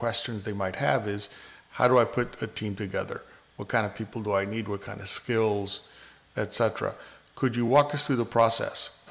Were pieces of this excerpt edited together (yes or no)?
no